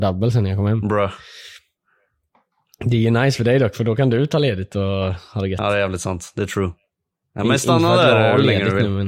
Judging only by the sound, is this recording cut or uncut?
uncut